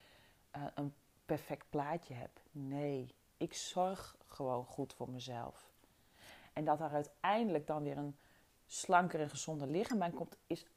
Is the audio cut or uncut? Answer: uncut